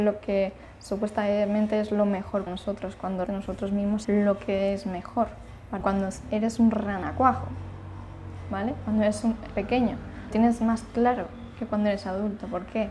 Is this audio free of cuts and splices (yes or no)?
no